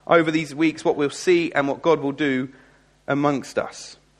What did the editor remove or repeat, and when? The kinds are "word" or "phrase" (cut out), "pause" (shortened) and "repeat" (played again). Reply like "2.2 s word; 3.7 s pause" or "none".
none